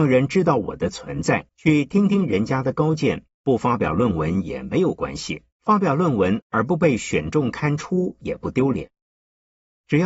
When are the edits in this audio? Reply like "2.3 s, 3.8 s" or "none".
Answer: 1.5 s, 3.3 s, 5.5 s